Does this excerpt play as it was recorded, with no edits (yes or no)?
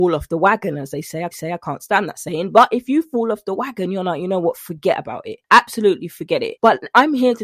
no